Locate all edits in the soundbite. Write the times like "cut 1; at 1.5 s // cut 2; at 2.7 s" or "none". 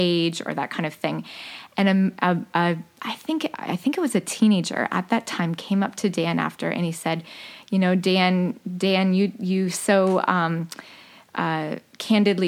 none